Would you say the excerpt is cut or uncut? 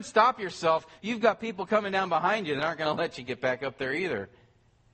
uncut